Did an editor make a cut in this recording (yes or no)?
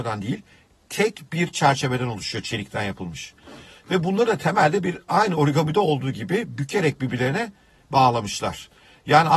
no